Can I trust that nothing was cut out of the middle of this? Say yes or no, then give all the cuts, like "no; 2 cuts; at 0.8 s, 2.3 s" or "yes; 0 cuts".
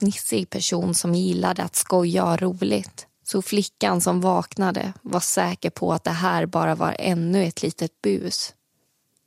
no; 1 cut; at 3.1 s